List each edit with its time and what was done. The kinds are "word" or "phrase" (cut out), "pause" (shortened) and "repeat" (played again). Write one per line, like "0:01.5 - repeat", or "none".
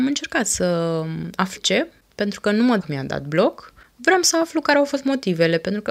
0:01.6 - word
0:02.8 - word